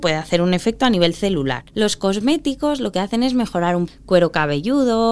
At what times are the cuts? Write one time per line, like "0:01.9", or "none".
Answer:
0:03.9

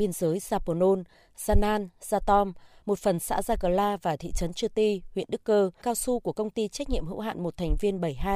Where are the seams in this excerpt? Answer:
0:05.8

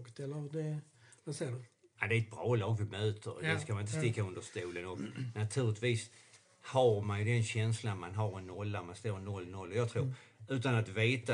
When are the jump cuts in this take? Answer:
none

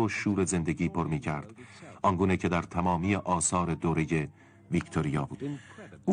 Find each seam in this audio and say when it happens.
none

